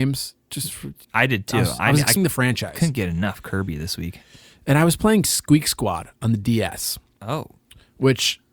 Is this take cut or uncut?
cut